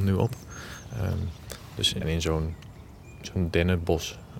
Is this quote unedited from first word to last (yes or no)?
no